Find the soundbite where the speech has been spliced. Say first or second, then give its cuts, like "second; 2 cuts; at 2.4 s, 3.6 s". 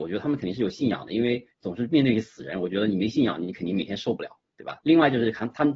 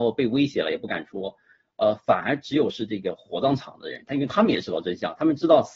first; 2 cuts; at 1.5 s, 4.8 s